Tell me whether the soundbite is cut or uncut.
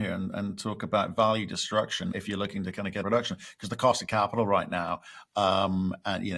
cut